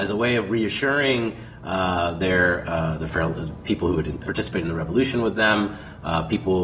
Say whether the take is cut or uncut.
cut